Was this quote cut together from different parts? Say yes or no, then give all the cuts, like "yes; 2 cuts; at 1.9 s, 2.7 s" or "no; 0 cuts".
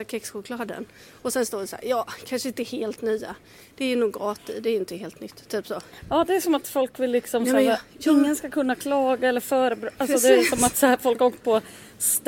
no; 0 cuts